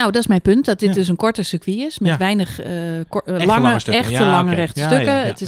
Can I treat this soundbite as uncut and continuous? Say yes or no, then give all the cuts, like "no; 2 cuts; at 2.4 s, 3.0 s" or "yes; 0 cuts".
yes; 0 cuts